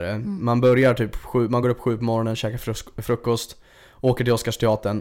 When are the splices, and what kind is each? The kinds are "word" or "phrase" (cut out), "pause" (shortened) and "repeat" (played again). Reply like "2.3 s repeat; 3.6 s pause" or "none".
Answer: none